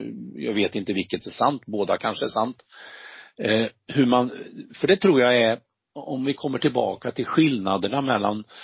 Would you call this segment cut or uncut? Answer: uncut